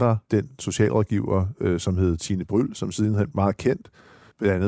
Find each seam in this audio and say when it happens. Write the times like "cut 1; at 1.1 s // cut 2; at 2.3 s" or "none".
cut 1; at 3.3 s